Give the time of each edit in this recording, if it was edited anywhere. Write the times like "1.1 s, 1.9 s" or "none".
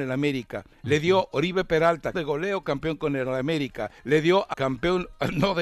2.1 s, 4.0 s, 4.5 s